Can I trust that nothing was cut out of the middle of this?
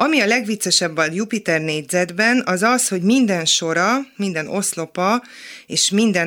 yes; 0 cuts

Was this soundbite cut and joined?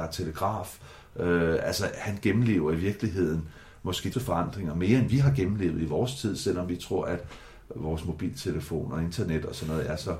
yes; 2 cuts; at 4.1 s, 5.1 s

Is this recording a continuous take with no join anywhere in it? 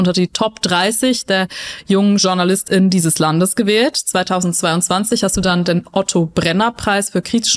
yes; 0 cuts

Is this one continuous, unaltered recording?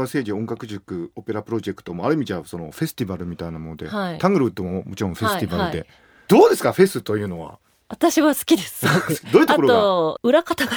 yes; 0 cuts

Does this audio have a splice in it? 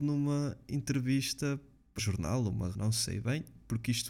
yes; 2 cuts; at 2.0 s, 2.7 s

